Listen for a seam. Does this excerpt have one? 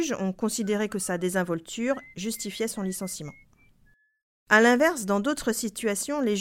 no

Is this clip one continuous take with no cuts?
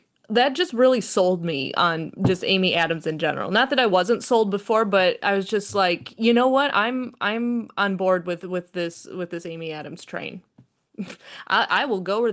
yes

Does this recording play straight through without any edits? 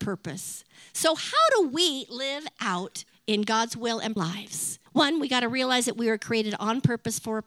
no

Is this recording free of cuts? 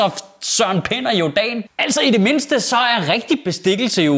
yes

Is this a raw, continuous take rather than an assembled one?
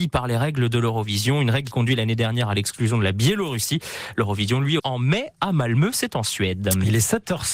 no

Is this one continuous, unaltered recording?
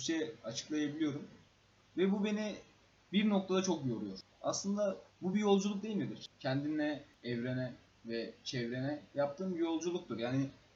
yes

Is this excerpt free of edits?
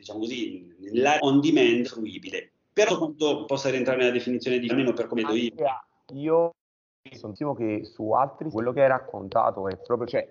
no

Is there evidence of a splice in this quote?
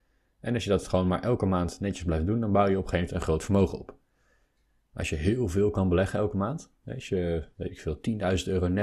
no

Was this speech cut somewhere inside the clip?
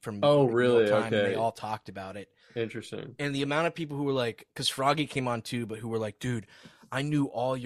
no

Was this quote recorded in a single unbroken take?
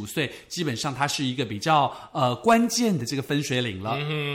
yes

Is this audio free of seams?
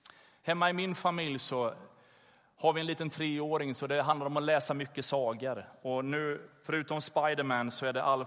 yes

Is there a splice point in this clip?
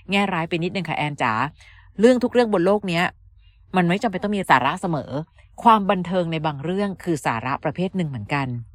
no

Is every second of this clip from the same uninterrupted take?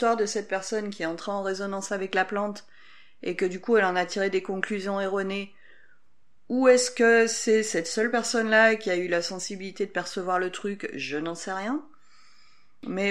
yes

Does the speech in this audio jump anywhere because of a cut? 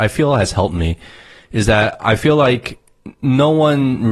no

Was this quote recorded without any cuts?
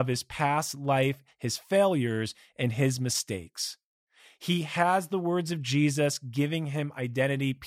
yes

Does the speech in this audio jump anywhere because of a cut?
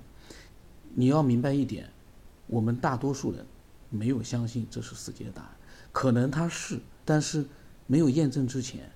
yes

